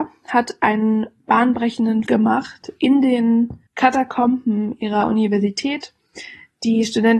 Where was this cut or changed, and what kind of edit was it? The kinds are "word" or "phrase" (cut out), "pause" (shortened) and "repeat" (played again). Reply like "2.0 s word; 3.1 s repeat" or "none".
2.1 s word; 3.7 s pause